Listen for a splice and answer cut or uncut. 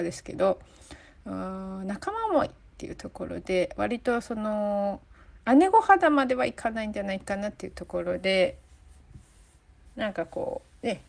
uncut